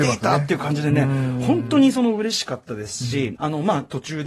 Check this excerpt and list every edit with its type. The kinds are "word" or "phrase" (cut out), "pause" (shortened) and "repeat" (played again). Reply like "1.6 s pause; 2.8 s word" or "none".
3.4 s word